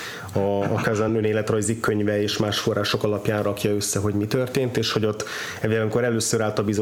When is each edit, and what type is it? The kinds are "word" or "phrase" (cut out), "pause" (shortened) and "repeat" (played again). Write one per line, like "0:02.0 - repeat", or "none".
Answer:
none